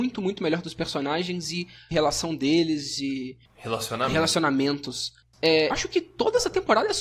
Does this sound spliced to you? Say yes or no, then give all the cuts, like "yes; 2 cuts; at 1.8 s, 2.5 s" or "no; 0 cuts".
yes; 3 cuts; at 1.9 s, 3.5 s, 5.7 s